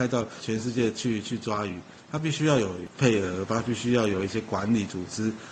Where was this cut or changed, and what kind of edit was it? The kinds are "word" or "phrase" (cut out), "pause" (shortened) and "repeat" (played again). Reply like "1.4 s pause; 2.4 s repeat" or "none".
none